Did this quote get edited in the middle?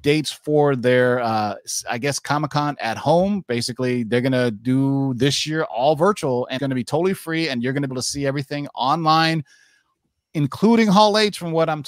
yes; 2 cuts; at 6.6 s, 7.9 s

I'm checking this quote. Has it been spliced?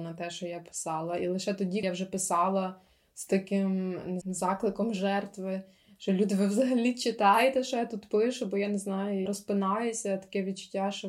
yes; 3 cuts; at 1.8 s, 4.2 s, 9.3 s

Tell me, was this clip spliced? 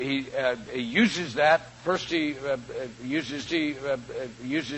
yes; 1 cut; at 3.5 s

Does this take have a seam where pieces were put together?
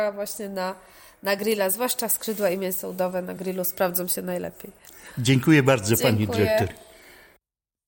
no; 0 cuts

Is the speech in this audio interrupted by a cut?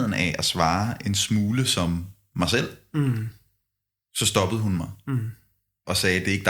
no; 0 cuts

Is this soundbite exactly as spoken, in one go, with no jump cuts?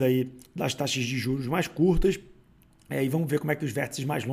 yes; 0 cuts

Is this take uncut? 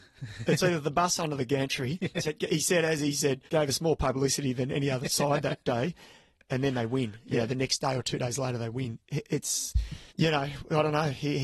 no; 3 cuts; at 2.2 s, 3.5 s, 10.1 s

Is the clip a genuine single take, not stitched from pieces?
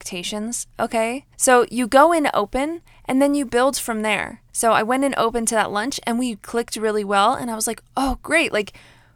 no; 2 cuts; at 1.3 s, 4.5 s

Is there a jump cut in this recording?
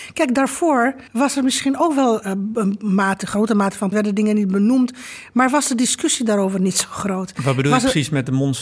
yes; 3 cuts; at 1.1 s, 2.2 s, 3.9 s

